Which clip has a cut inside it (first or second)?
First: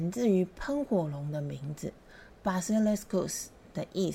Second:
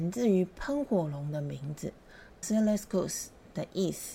second